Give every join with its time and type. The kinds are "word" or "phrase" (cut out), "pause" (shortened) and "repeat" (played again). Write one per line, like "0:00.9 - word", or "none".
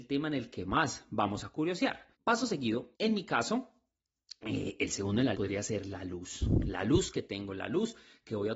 0:02.1 - pause
0:02.9 - pause
0:05.3 - word